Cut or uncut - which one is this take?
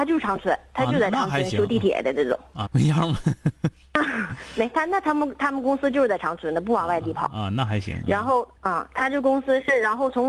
cut